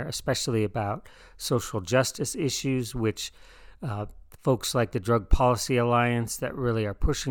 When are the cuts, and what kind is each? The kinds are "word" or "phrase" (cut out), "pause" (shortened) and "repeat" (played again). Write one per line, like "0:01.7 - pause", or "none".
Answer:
none